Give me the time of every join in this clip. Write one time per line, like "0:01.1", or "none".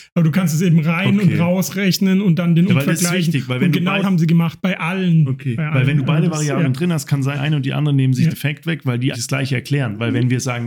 0:02.7
0:04.0
0:07.3
0:08.3
0:09.1